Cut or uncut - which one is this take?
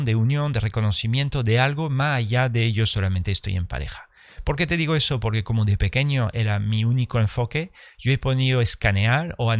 uncut